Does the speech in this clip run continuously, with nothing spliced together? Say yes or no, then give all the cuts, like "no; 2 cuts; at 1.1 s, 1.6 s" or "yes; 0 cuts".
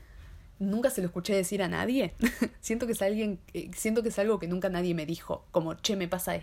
yes; 0 cuts